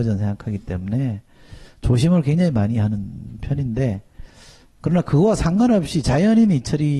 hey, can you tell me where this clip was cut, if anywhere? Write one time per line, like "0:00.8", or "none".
none